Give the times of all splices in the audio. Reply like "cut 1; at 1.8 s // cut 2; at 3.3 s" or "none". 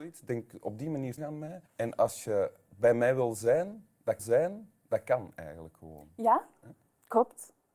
cut 1; at 1.2 s // cut 2; at 1.7 s // cut 3; at 4.2 s